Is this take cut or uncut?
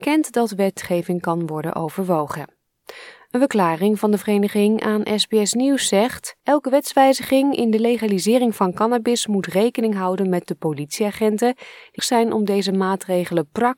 cut